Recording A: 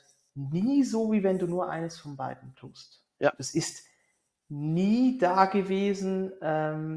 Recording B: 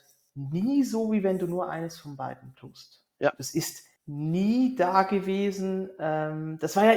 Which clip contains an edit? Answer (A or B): B